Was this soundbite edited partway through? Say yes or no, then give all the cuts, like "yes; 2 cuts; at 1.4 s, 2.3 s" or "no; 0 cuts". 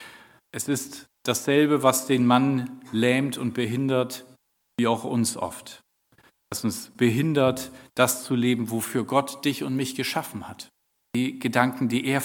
no; 0 cuts